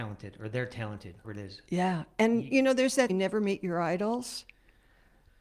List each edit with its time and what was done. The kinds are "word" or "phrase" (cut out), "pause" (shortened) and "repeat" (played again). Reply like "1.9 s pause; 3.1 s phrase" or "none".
1.2 s word; 3.1 s word